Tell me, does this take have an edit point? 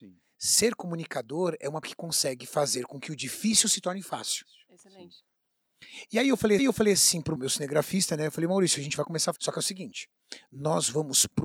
yes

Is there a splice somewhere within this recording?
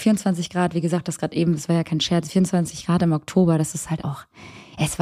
yes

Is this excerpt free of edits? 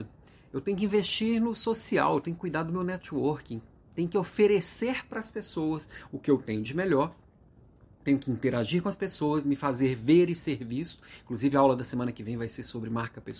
yes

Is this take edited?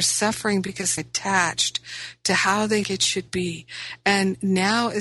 yes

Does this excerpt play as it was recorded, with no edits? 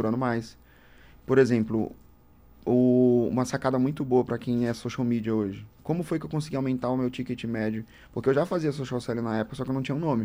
yes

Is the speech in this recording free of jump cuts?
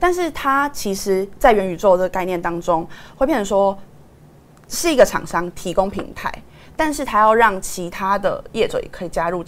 yes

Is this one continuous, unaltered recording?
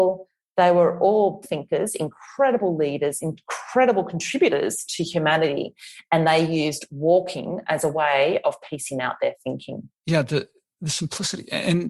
no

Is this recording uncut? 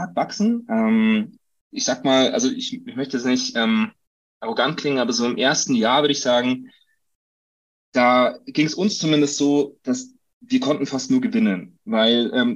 yes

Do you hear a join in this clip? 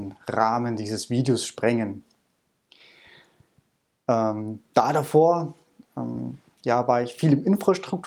no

